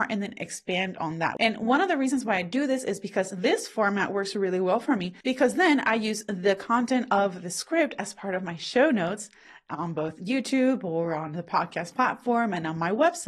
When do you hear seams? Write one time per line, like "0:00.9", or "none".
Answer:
none

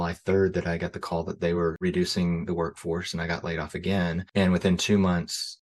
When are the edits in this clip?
none

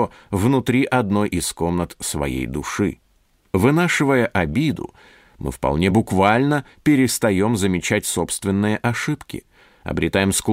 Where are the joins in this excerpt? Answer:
none

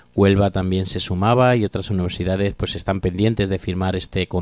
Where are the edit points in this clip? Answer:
none

